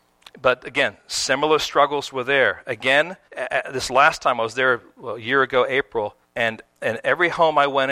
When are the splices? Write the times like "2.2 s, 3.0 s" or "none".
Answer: 3.2 s, 6.2 s